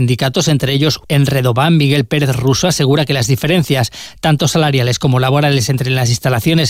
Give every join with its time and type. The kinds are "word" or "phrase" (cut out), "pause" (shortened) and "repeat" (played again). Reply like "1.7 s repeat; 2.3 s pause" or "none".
1.0 s phrase